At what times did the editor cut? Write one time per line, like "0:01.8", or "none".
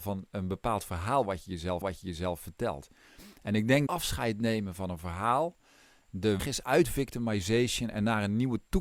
0:01.8
0:03.9
0:06.4

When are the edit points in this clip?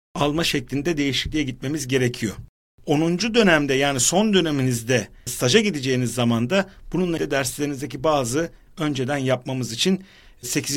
0:07.2
0:08.7

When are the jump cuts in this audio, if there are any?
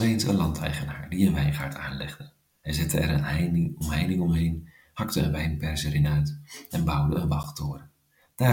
none

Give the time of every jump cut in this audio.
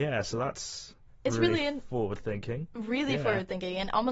none

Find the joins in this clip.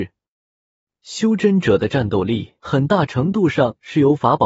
0:02.6

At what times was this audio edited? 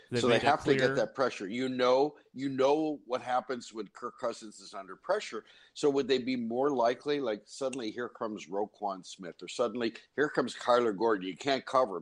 none

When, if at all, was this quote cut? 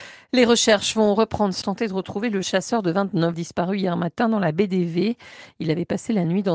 0:01.6
0:02.4
0:03.3

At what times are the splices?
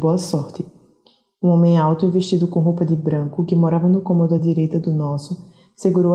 none

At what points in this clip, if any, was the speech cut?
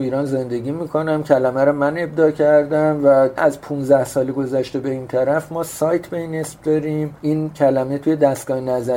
none

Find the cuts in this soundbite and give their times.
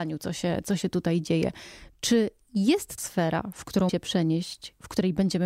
0:03.0
0:03.9

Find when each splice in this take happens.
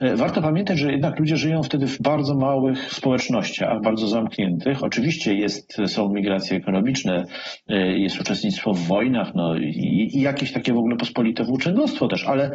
none

